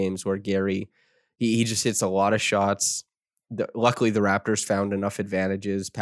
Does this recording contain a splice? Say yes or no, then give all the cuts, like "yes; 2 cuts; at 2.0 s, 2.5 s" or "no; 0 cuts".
no; 0 cuts